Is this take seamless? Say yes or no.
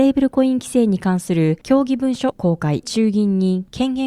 no